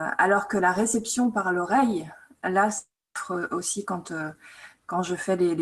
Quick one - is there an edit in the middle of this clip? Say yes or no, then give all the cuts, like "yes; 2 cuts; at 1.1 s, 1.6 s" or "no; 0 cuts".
no; 0 cuts